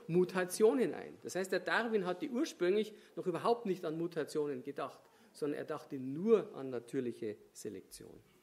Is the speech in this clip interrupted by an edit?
no; 0 cuts

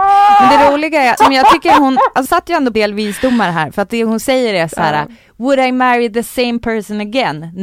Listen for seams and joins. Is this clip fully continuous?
no; 3 cuts; at 1.2 s, 2.3 s, 2.7 s

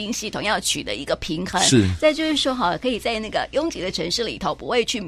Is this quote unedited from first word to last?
yes; 0 cuts

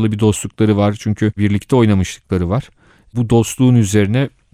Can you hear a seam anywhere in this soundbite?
yes; 1 cut; at 1.4 s

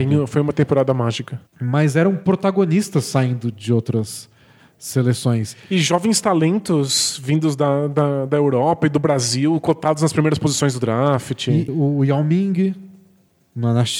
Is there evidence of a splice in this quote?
yes; 2 cuts; at 1.5 s, 11.7 s

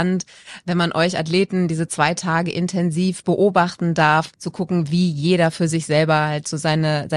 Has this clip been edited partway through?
yes; 1 cut; at 4.3 s

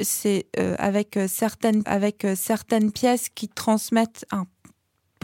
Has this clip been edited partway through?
yes; 1 cut; at 1.8 s

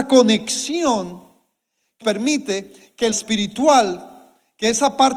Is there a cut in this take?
yes; 2 cuts; at 2.0 s, 3.1 s

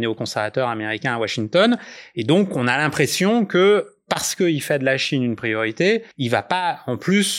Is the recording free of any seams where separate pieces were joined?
no; 1 cut; at 6.1 s

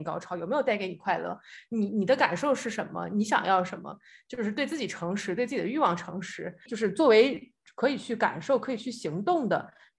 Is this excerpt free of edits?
yes; 0 cuts

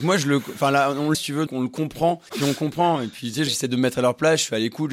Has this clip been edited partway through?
yes; 4 cuts; at 1.1 s, 1.5 s, 2.3 s, 3.5 s

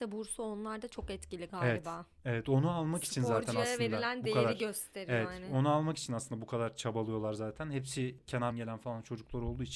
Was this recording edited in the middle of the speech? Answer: yes; 1 cut; at 8.5 s

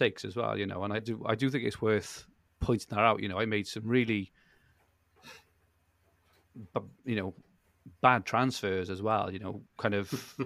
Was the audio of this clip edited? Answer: yes; 1 cut; at 1.0 s

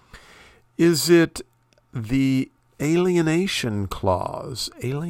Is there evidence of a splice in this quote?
no; 0 cuts

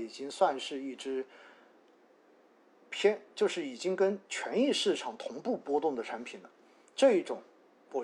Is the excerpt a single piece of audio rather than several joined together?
yes; 0 cuts

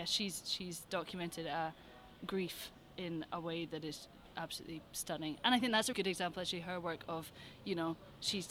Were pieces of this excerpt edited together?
yes; 1 cut; at 5.9 s

